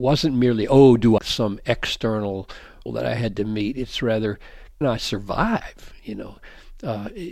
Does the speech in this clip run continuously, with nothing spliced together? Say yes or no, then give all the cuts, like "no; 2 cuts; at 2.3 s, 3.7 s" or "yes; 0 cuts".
no; 3 cuts; at 1.2 s, 2.9 s, 4.8 s